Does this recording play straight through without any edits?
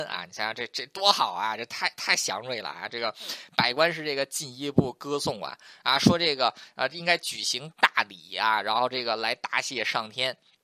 yes; 0 cuts

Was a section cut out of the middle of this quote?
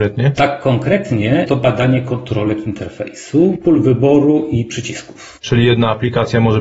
no; 0 cuts

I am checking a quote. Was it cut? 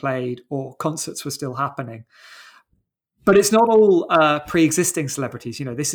no; 0 cuts

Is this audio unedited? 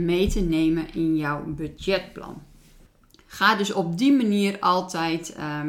yes; 0 cuts

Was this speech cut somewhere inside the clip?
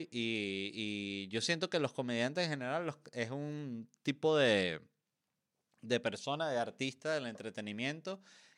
no; 0 cuts

